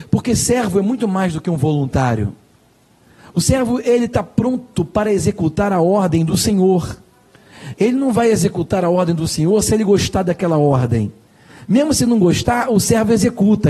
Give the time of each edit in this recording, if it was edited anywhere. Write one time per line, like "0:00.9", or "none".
none